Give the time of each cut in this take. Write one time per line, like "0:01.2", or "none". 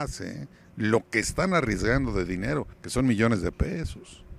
0:01.2
0:02.7